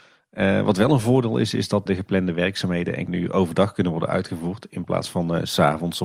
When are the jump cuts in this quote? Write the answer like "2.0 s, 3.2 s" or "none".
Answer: 1.9 s, 3.1 s